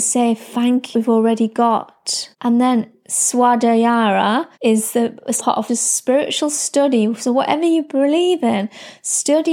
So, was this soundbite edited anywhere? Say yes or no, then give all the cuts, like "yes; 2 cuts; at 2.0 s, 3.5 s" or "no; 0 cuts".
yes; 5 cuts; at 0.9 s, 2.3 s, 4.5 s, 5.4 s, 5.7 s